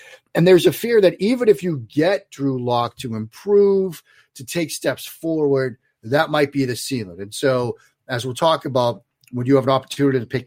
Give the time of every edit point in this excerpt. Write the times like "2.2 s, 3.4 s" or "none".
none

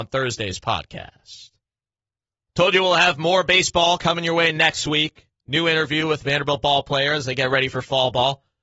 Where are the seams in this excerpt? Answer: none

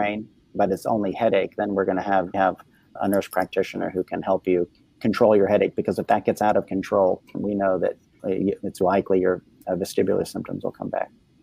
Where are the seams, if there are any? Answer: 2.3 s, 3.0 s, 4.9 s, 7.3 s, 8.2 s, 8.8 s

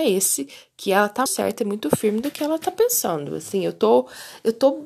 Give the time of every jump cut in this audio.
1.3 s

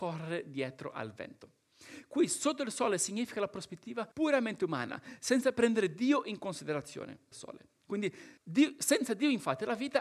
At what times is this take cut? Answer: 4.1 s, 7.3 s, 8.4 s

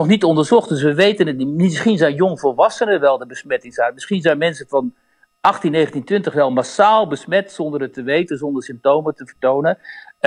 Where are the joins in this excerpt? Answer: none

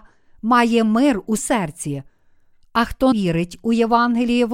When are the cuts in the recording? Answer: 1.4 s, 3.1 s

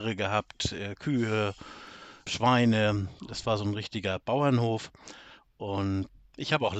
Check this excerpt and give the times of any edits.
none

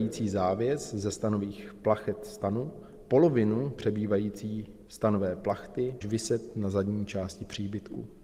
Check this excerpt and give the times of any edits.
4.9 s, 6.0 s

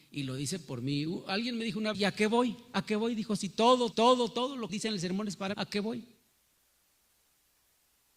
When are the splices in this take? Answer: 1.9 s, 3.9 s, 4.7 s, 5.5 s

